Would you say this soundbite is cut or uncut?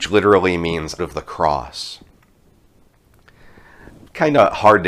cut